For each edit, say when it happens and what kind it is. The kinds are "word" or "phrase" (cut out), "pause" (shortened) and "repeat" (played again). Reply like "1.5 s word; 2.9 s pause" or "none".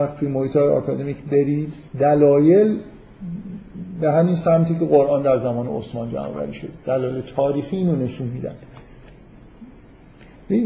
1.9 s pause; 6.8 s pause